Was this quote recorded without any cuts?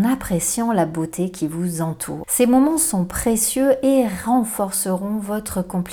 yes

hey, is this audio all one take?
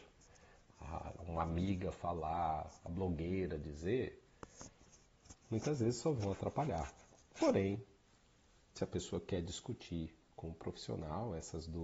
no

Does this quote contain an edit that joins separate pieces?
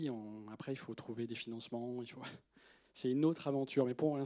no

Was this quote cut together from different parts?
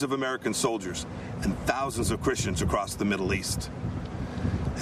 no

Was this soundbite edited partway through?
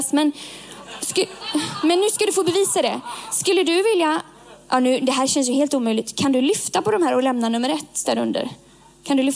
no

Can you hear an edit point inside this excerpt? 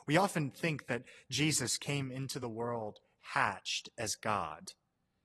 no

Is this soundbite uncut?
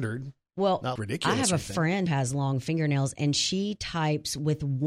no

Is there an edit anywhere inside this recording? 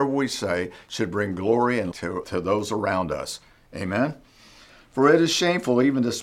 yes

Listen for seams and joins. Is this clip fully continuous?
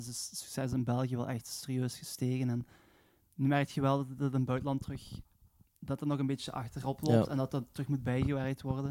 yes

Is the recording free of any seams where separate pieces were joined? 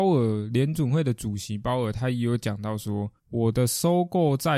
no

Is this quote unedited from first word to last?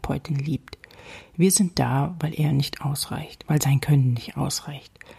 yes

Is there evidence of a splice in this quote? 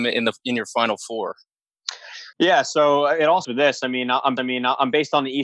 yes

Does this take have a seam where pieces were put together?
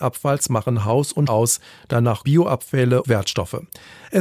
yes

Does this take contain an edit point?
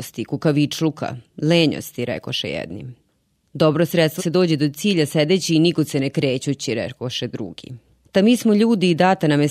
yes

